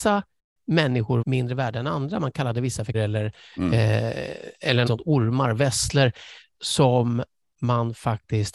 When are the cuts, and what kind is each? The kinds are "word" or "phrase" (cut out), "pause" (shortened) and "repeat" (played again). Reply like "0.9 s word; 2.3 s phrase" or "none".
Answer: 1.2 s word; 2.9 s word; 4.9 s word; 6.5 s word